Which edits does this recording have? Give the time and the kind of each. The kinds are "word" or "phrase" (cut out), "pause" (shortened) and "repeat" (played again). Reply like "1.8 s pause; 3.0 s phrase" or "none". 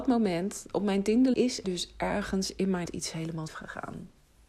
1.3 s word; 1.6 s word; 2.9 s word; 3.5 s word